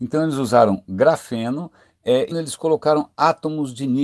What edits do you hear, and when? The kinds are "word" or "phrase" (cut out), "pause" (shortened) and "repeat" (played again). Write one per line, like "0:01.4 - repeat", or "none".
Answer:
0:02.3 - phrase